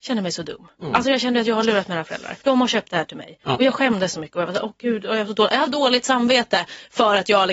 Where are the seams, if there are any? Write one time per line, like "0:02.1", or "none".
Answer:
0:02.4
0:05.7